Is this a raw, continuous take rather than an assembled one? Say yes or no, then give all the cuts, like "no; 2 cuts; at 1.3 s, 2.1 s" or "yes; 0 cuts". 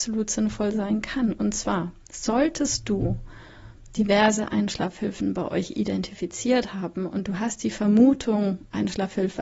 yes; 0 cuts